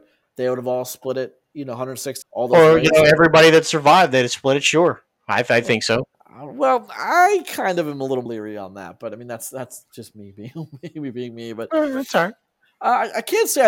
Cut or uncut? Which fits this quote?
cut